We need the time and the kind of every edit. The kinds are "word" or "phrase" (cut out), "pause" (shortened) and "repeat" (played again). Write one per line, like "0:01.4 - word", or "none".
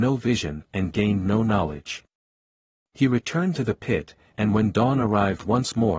none